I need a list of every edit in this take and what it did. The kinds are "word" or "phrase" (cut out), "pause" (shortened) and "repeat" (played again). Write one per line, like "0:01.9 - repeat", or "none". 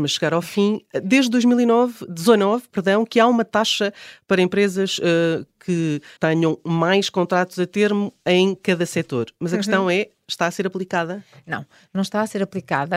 0:06.2 - word